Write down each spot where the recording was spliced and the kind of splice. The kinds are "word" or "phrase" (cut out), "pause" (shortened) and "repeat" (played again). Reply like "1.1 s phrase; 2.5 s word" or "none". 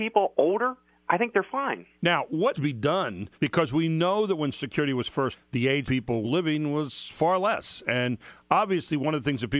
1.9 s pause; 2.5 s word; 3.3 s pause; 4.5 s word; 5.3 s word; 5.8 s word; 6.2 s word